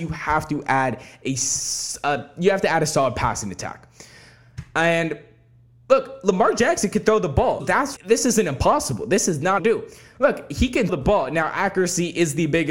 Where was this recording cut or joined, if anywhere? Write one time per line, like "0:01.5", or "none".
0:07.6
0:08.0
0:09.6
0:10.9